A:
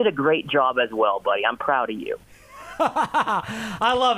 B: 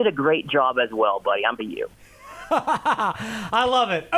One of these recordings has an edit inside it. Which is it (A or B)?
B